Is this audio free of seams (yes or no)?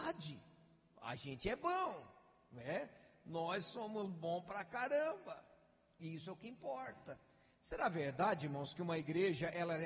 yes